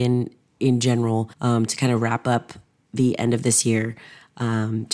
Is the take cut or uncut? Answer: cut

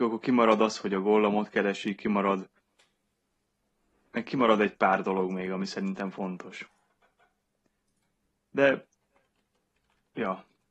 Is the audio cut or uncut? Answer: uncut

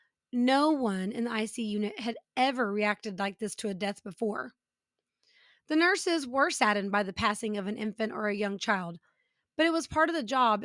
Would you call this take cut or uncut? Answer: uncut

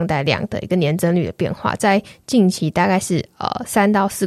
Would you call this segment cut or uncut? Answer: uncut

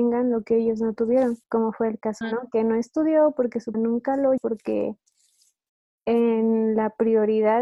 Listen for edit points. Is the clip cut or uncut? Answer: cut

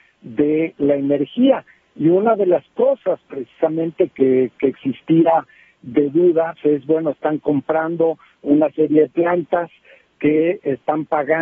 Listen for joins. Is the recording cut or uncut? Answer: cut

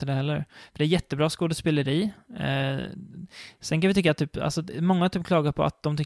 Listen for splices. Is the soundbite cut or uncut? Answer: uncut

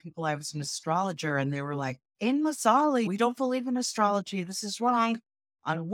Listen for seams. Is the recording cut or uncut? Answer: cut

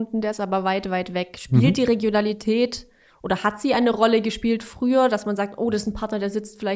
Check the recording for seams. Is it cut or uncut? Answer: uncut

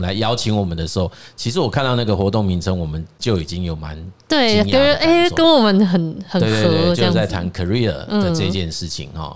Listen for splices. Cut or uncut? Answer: uncut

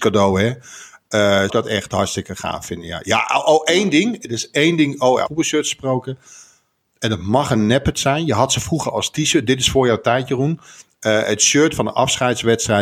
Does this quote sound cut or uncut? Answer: cut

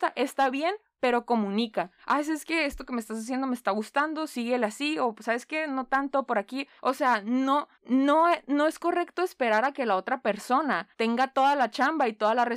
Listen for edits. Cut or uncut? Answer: cut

